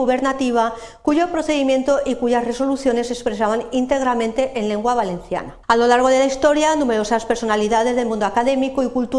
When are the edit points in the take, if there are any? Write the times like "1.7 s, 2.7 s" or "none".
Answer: 5.6 s